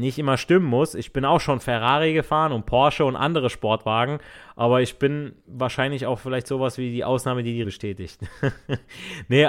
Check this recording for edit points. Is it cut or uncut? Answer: cut